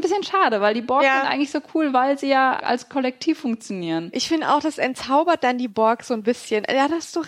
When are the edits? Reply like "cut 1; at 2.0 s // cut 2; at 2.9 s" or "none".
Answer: cut 1; at 2.6 s